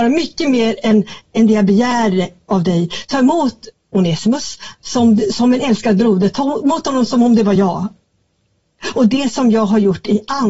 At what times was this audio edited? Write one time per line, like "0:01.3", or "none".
none